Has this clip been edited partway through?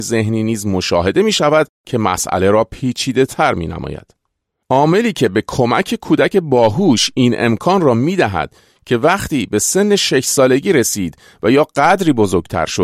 no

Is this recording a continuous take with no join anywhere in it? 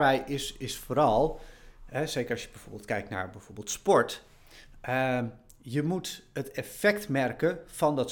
yes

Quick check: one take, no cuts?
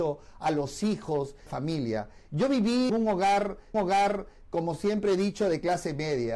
no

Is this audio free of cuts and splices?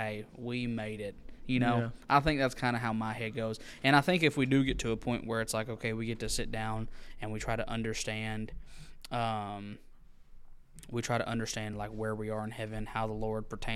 yes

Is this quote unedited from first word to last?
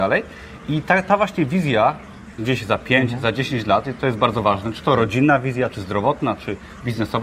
yes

